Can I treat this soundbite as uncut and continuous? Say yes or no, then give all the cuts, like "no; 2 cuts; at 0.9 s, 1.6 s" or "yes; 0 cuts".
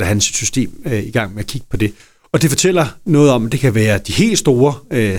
yes; 0 cuts